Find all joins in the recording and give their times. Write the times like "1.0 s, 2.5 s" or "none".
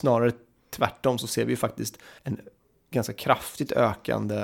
2.2 s

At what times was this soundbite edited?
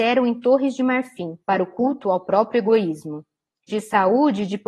1.4 s, 3.7 s

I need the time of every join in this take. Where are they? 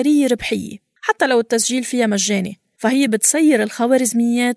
none

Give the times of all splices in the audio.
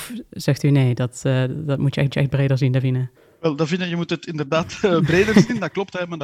2.1 s, 3.2 s

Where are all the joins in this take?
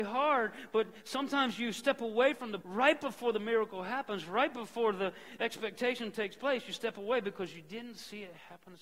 2.6 s

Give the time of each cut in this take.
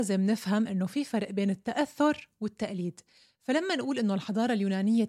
none

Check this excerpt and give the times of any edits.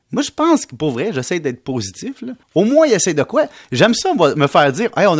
2.4 s

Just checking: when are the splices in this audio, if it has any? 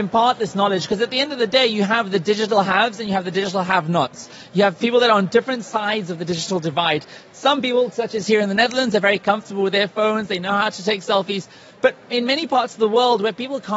none

